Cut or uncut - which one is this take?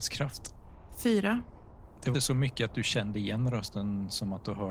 cut